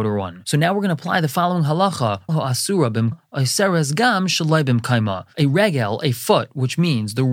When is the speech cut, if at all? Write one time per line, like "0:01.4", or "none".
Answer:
0:02.3
0:03.1

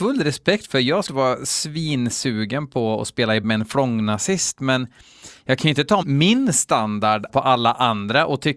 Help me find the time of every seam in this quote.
0:01.1
0:03.4
0:06.0
0:07.3

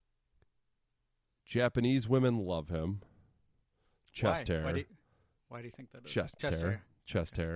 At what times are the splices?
0:06.4

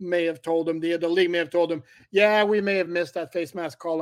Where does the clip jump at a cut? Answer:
none

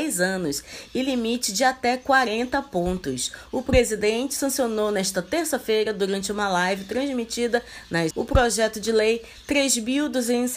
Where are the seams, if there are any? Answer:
0:08.1

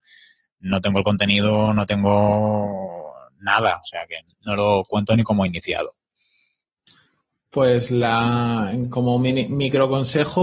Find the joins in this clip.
none

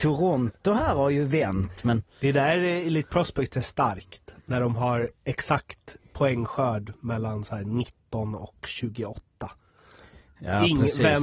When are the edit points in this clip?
none

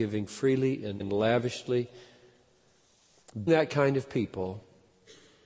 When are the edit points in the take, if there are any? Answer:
0:01.0
0:03.5

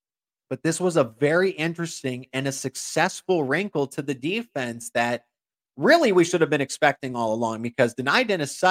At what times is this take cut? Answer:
none

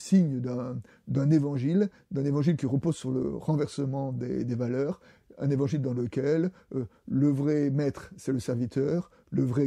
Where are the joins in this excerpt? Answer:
none

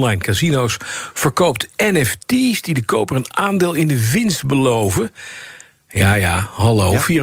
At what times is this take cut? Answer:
none

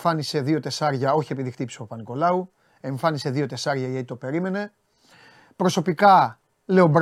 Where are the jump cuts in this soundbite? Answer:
none

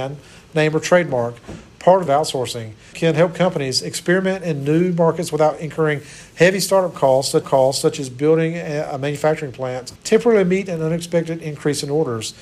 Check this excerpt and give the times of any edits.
0:02.1
0:02.9
0:07.4
0:10.0

